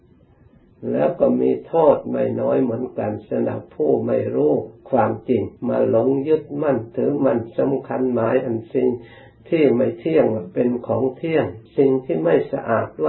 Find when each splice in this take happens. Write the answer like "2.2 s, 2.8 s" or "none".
4.8 s, 5.6 s, 11.7 s